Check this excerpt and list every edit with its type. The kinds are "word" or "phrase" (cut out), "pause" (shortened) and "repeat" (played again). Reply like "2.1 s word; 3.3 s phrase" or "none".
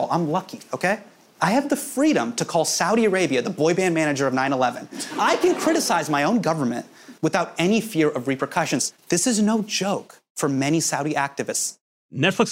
7.2 s pause; 9.0 s pause